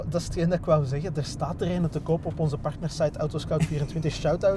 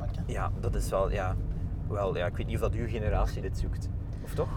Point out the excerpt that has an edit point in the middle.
second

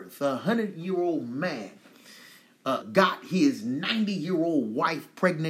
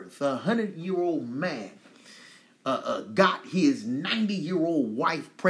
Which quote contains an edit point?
first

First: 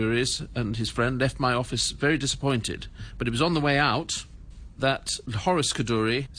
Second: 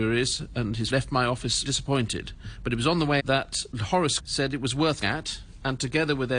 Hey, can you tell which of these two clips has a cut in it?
second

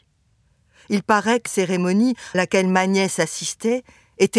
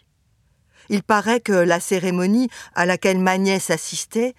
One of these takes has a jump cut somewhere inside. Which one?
first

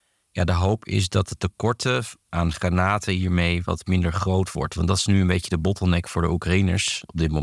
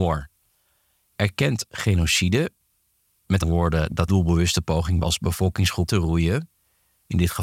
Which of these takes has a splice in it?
second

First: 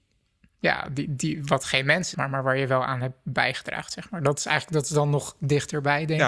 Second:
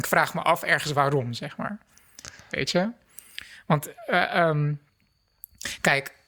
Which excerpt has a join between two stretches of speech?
first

